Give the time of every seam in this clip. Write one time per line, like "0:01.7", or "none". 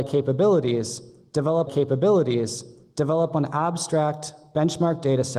0:01.7

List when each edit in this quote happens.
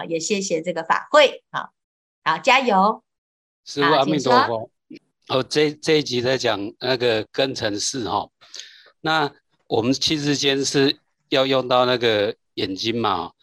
none

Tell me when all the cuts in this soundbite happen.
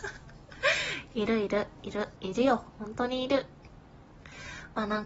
0:02.2

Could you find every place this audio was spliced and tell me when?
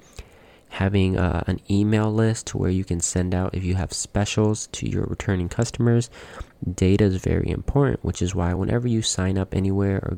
none

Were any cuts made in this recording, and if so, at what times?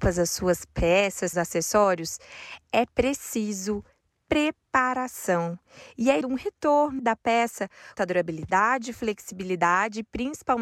0:01.3
0:06.2
0:07.0
0:08.0

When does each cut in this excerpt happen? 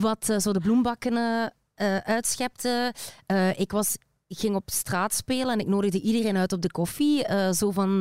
none

